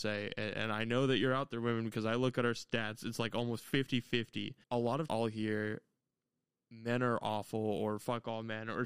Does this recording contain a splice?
yes; 2 cuts; at 4.6 s, 5.1 s

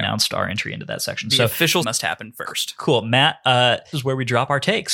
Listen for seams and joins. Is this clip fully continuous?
no; 2 cuts; at 1.8 s, 3.9 s

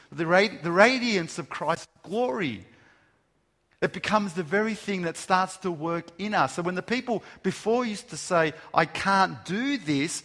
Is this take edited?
no; 0 cuts

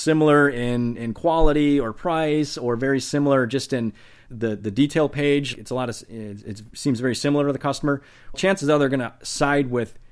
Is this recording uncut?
no; 3 cuts; at 4.3 s, 5.5 s, 8.3 s

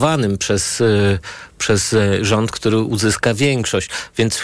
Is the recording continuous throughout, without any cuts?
yes; 0 cuts

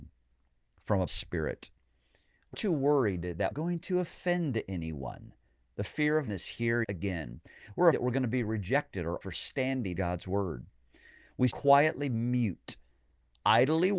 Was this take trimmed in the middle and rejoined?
yes; 9 cuts; at 1.1 s, 2.5 s, 3.5 s, 6.3 s, 6.8 s, 7.9 s, 9.2 s, 9.9 s, 11.5 s

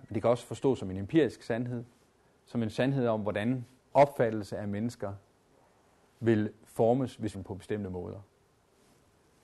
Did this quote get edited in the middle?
yes; 2 cuts; at 3.9 s, 7.3 s

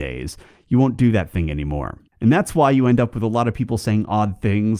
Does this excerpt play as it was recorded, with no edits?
no; 1 cut; at 2.1 s

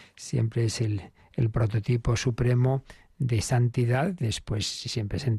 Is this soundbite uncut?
yes; 0 cuts

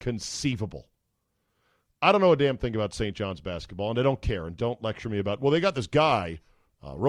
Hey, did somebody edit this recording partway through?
no; 0 cuts

